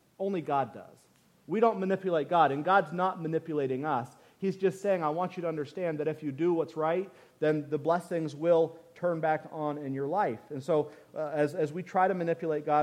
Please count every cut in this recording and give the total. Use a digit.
0